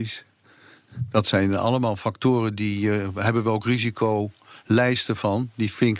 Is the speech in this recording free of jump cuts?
yes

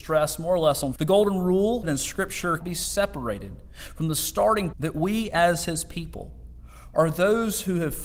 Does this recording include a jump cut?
yes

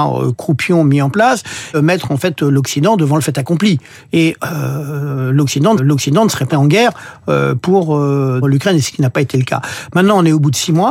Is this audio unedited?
no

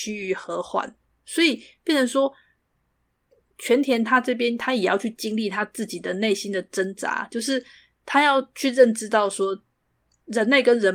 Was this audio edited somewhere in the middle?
no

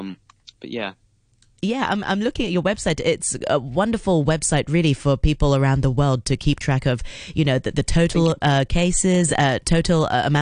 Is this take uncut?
yes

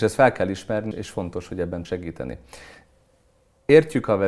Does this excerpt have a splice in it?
yes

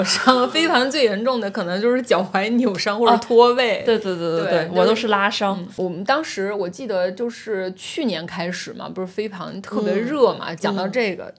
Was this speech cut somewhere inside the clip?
no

